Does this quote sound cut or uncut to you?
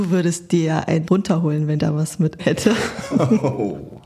cut